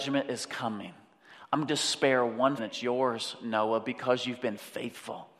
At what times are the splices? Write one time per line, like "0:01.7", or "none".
0:01.7
0:02.6